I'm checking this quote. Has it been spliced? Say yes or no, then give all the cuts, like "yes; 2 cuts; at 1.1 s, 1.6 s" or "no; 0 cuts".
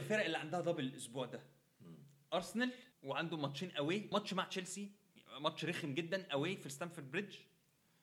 yes; 2 cuts; at 2.9 s, 4.1 s